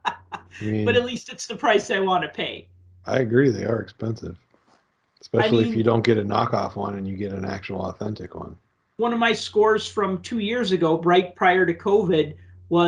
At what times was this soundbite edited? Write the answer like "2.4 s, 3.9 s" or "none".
none